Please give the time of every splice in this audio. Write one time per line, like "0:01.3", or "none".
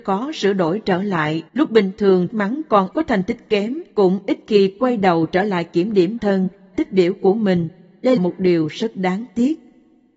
0:01.5
0:02.3
0:02.9
0:03.9
0:06.2
0:06.7
0:08.2